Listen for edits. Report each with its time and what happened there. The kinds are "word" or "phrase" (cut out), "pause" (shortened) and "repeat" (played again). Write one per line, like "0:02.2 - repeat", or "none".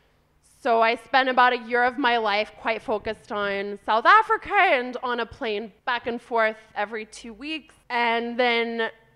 0:05.8 - pause
0:07.8 - pause